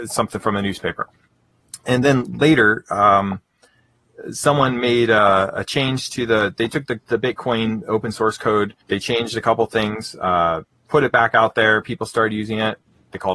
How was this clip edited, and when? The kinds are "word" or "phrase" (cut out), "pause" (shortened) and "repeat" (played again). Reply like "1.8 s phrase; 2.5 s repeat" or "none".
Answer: 7.0 s pause; 8.8 s pause; 10.7 s pause